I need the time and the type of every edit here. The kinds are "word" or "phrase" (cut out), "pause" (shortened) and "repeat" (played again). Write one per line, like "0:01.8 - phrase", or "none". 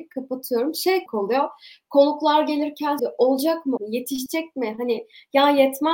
0:01.1 - word
0:03.0 - word
0:03.8 - word